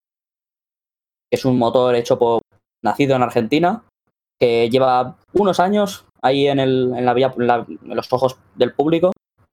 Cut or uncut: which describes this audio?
uncut